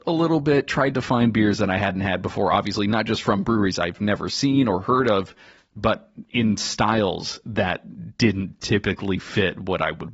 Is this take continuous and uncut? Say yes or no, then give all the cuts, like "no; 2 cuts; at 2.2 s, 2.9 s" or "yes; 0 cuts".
yes; 0 cuts